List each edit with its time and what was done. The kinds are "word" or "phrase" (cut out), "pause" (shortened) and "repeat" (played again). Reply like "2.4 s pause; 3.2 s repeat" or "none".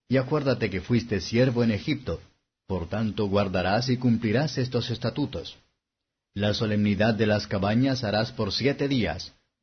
none